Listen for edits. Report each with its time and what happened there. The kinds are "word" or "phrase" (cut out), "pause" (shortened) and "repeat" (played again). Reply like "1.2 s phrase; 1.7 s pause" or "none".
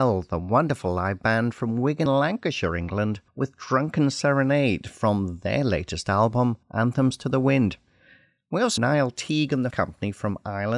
2.1 s word; 3.3 s pause; 6.6 s pause; 8.8 s phrase; 9.7 s word